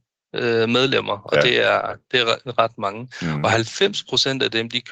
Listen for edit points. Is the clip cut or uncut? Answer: uncut